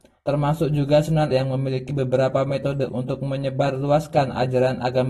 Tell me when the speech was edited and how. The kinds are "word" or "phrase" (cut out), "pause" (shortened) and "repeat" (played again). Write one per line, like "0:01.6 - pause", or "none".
0:01.3 - word
0:02.9 - word